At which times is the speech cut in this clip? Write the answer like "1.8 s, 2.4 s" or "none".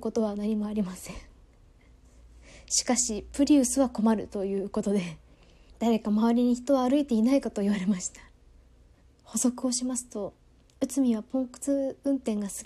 none